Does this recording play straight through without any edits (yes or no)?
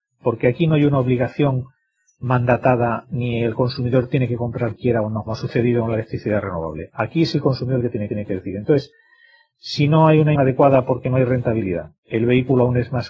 no